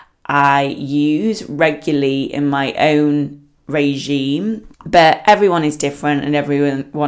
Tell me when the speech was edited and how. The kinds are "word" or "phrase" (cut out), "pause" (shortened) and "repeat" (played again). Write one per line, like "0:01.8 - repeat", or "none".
0:04.7 - pause